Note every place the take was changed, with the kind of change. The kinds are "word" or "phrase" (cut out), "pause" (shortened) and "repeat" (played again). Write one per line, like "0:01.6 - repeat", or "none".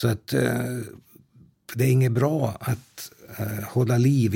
none